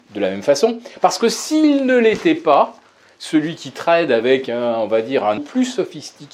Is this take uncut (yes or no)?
no